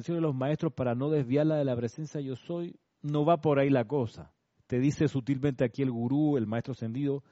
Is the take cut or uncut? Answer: cut